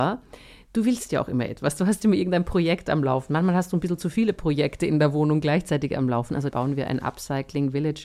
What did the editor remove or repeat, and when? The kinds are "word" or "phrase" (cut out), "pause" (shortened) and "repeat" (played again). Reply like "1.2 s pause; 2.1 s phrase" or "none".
6.5 s word